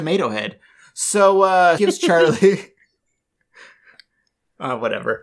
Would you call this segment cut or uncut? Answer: cut